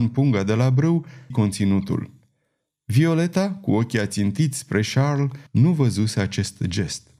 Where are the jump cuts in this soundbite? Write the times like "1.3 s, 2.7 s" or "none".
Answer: 1.3 s, 5.5 s